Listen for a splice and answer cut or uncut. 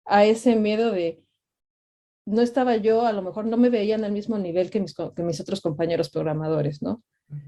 uncut